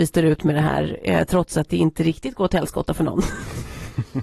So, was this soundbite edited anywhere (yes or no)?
no